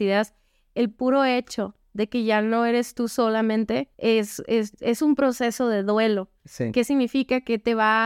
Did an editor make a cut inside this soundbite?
yes; 1 cut; at 3.9 s

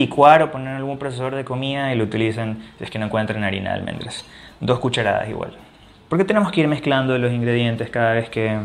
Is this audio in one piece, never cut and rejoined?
yes; 0 cuts

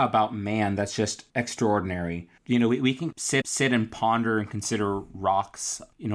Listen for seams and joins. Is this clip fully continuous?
no; 1 cut; at 3.4 s

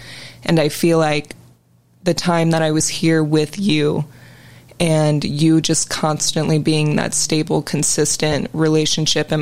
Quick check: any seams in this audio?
no; 0 cuts

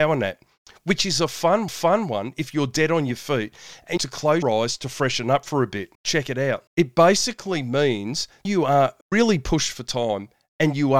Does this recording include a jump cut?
yes; 7 cuts; at 1.7 s, 4.0 s, 4.4 s, 5.9 s, 6.7 s, 8.4 s, 9.0 s

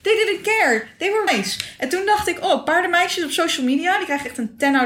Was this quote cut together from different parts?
yes; 1 cut; at 1.3 s

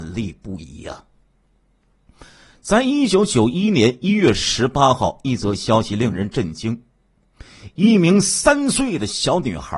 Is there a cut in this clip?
no; 0 cuts

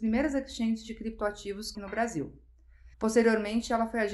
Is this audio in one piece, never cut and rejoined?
no; 2 cuts; at 1.7 s, 2.9 s

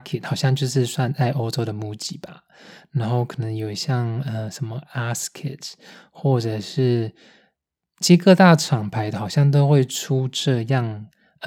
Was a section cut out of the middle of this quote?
no; 0 cuts

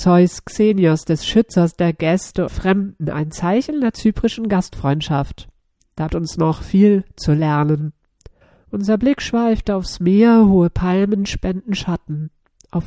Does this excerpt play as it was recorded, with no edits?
no; 4 cuts; at 2.5 s, 6.1 s, 8.4 s, 9.6 s

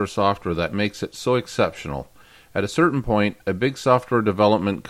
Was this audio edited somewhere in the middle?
no; 0 cuts

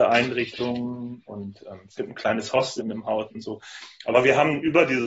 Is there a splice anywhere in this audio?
yes; 1 cut; at 2.8 s

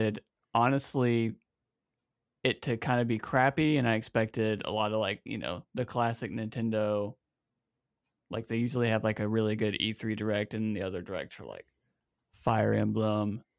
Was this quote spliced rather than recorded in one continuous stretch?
no; 0 cuts

